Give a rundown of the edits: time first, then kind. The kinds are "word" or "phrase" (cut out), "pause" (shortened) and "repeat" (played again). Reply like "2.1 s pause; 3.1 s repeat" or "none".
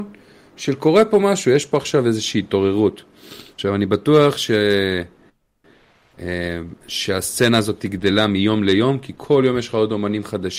3.5 s pause; 6.8 s pause